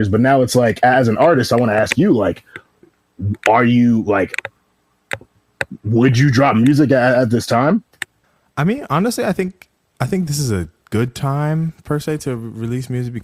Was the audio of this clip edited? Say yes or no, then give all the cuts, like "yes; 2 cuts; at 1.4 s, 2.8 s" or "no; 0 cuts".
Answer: yes; 2 cuts; at 8.2 s, 9.8 s